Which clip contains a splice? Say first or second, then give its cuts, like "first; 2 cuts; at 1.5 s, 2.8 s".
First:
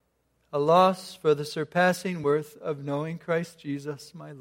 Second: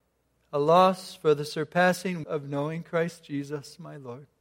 second; 1 cut; at 2.2 s